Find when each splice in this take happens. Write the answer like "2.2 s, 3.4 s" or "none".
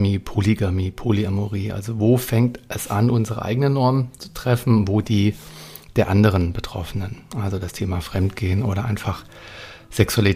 none